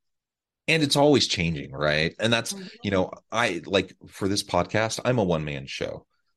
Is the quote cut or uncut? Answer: uncut